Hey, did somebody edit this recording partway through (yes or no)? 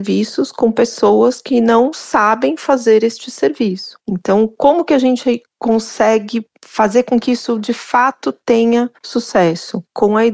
yes